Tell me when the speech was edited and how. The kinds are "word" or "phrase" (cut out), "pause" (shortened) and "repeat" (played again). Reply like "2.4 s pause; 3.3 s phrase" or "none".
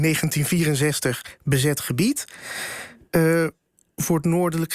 none